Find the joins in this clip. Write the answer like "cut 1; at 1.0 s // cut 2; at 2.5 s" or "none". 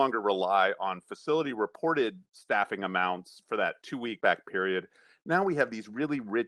cut 1; at 4.2 s